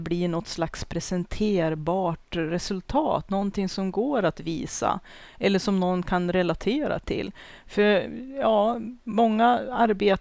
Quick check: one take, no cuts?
yes; 0 cuts

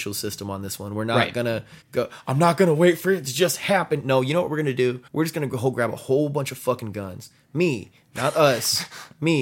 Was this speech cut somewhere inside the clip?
yes; 2 cuts; at 1.8 s, 5.1 s

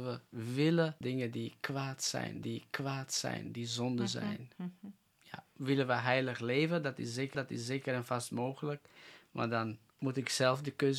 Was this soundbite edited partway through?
yes; 4 cuts; at 1.0 s, 2.4 s, 5.5 s, 7.3 s

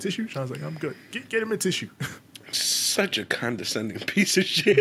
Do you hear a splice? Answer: no; 0 cuts

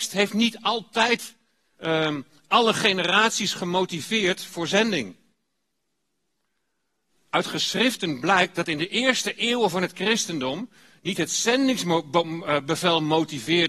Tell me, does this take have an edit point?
no; 0 cuts

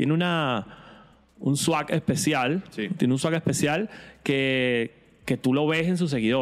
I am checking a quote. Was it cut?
no; 0 cuts

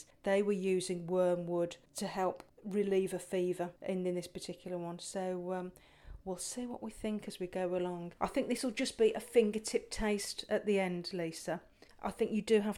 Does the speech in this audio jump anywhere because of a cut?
yes; 2 cuts; at 3.8 s, 8.2 s

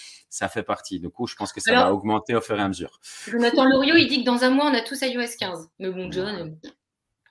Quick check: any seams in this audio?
yes; 1 cut; at 5.7 s

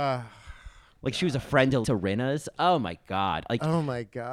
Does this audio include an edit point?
yes; 1 cut; at 1.8 s

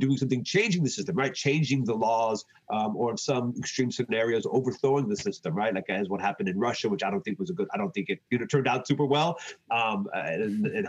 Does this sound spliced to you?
yes; 1 cut; at 8.3 s

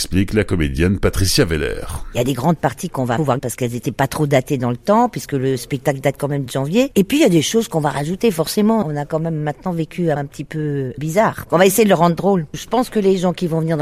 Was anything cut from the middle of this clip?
yes; 3 cuts; at 3.4 s, 6.5 s, 10.2 s

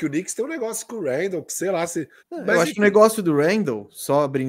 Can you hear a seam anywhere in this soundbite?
yes; 1 cut; at 2.2 s

